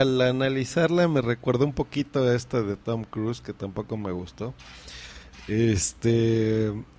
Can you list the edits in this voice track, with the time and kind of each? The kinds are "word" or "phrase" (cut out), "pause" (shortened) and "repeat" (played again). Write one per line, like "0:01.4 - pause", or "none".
none